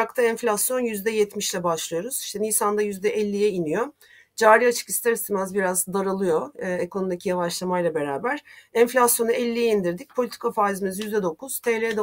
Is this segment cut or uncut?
uncut